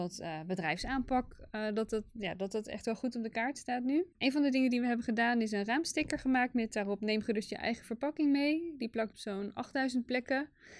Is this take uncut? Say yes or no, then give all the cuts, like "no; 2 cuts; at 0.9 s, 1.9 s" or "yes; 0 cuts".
no; 2 cuts; at 4.1 s, 9.1 s